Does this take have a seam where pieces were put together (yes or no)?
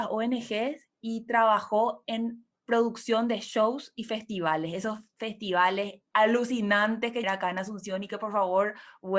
yes